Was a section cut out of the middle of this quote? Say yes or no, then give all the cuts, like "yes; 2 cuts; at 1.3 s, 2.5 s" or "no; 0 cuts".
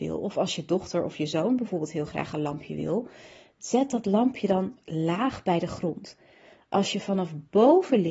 no; 0 cuts